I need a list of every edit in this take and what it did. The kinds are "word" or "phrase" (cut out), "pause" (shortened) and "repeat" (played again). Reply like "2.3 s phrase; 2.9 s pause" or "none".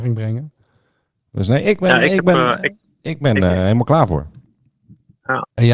3.2 s word